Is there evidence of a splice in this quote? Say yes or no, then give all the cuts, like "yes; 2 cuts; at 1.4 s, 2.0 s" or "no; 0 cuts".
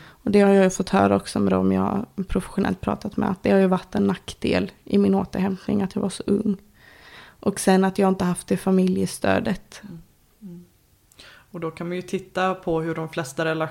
no; 0 cuts